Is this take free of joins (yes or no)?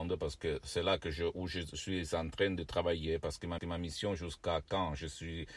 no